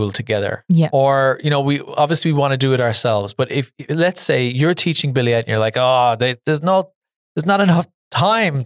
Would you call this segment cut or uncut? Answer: uncut